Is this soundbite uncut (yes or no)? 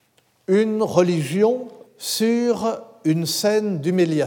no